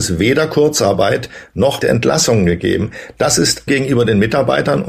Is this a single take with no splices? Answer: no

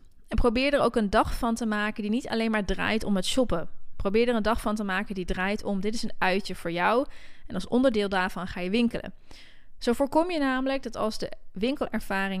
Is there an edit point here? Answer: no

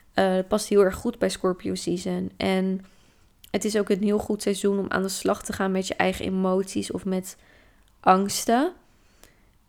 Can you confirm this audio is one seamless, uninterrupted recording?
yes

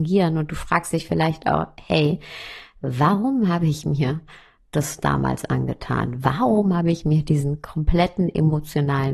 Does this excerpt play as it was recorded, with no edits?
yes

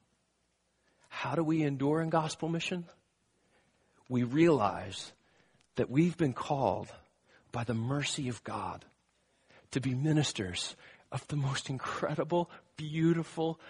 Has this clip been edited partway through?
no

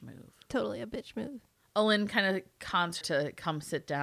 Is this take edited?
yes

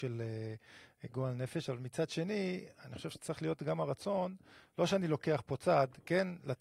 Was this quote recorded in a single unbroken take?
yes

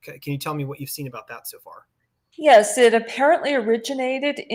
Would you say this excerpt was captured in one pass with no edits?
yes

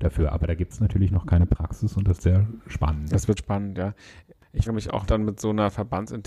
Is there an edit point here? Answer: yes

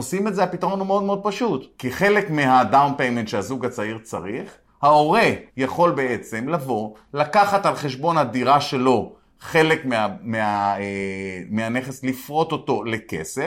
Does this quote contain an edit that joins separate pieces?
yes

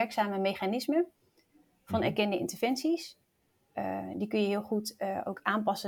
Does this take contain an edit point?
no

